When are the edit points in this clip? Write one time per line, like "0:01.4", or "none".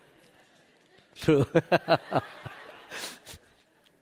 0:01.2